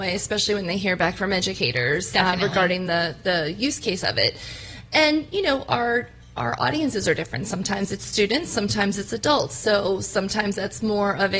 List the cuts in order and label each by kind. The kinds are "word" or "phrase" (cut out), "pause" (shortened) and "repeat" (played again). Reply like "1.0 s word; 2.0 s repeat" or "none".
none